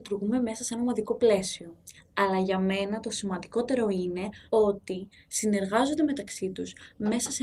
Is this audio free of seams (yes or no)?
no